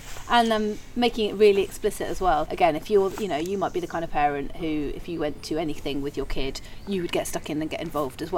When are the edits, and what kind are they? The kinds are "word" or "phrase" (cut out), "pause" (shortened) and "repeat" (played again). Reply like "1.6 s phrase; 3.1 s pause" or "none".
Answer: 2.5 s word